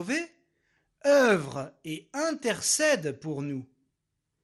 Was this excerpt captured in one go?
yes; 0 cuts

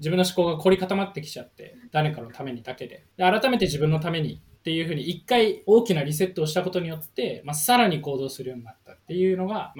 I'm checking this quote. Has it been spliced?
yes; 1 cut; at 3.1 s

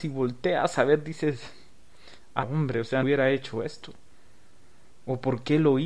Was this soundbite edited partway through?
yes; 2 cuts; at 2.4 s, 3.0 s

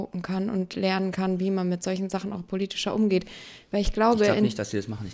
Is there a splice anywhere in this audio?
no; 0 cuts

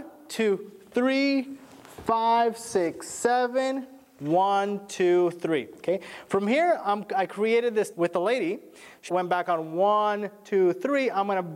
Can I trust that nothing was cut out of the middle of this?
no; 2 cuts; at 7.9 s, 9.1 s

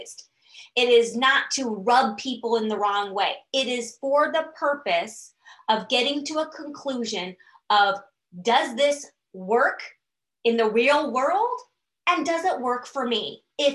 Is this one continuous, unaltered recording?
yes; 0 cuts

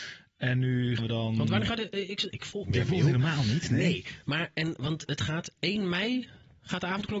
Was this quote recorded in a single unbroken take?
no; 3 cuts; at 1.0 s, 2.3 s, 2.6 s

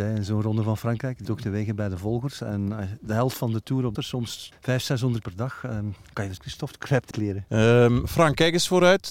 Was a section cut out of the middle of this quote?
yes; 6 cuts; at 1.2 s, 3.9 s, 4.5 s, 5.2 s, 6.4 s, 7.1 s

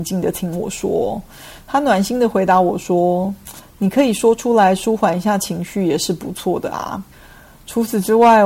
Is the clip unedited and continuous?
no; 1 cut; at 7.1 s

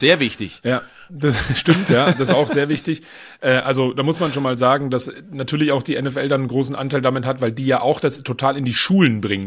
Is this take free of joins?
yes; 0 cuts

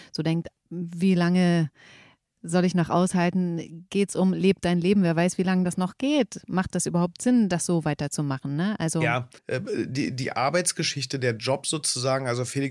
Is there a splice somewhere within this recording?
yes; 1 cut; at 9.4 s

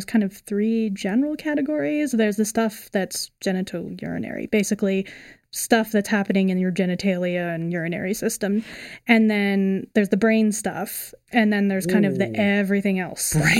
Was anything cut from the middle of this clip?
no; 0 cuts

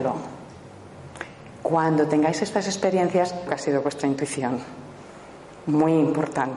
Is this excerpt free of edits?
no; 1 cut; at 3.5 s

